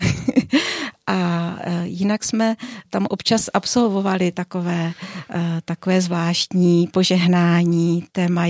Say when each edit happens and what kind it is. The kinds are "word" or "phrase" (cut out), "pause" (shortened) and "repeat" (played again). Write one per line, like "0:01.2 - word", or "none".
none